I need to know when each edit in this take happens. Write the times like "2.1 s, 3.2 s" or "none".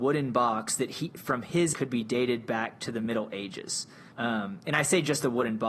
1.7 s, 4.1 s